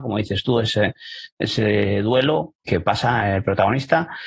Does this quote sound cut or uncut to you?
cut